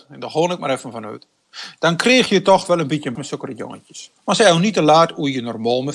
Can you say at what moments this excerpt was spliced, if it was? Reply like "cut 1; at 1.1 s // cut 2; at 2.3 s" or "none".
cut 1; at 3.1 s // cut 2; at 4.2 s